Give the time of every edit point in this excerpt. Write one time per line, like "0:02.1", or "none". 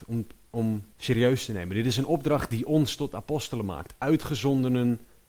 0:00.9